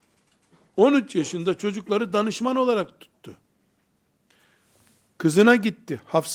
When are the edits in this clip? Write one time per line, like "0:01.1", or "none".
none